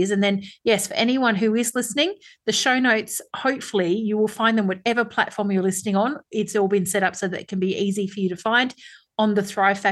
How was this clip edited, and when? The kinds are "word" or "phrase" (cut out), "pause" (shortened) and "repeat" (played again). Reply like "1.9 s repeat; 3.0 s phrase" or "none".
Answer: none